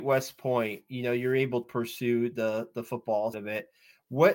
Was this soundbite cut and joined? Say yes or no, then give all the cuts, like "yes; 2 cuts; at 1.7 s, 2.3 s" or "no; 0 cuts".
yes; 2 cuts; at 1.6 s, 3.3 s